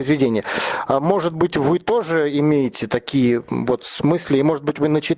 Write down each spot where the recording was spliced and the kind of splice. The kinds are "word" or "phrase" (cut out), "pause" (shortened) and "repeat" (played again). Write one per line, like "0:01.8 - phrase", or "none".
none